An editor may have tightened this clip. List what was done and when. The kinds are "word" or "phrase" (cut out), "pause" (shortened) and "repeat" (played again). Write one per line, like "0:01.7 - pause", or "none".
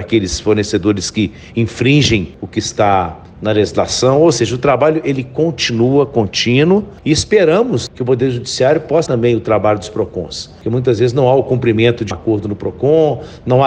0:09.1 - word
0:12.1 - word